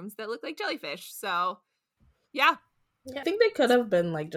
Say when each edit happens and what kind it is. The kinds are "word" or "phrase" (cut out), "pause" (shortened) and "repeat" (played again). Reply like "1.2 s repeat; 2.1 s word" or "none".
3.2 s word